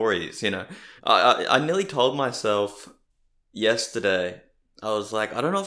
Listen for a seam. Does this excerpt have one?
yes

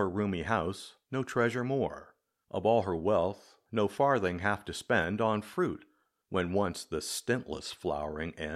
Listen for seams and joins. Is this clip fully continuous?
yes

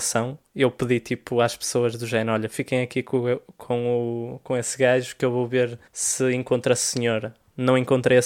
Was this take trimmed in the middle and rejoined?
yes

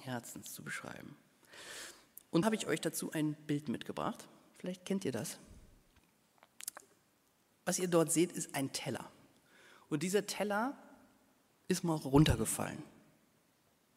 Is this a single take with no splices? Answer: no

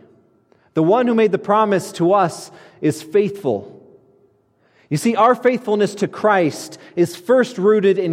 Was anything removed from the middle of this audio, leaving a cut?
no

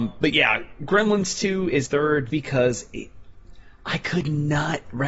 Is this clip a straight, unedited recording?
no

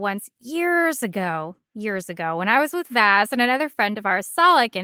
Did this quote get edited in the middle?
no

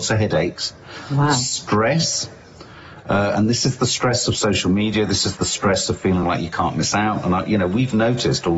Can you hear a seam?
no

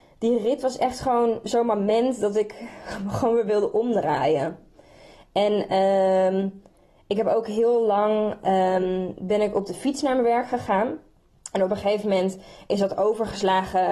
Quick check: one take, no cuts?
yes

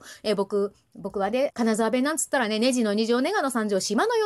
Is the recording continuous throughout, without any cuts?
no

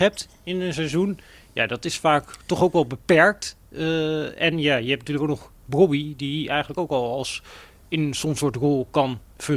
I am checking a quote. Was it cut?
no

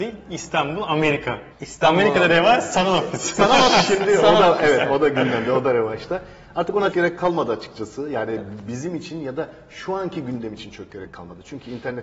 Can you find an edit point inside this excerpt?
yes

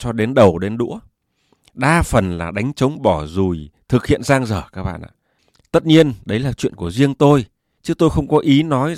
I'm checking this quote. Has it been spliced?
no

